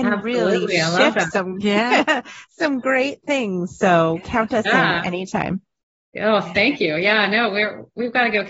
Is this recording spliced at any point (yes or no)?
no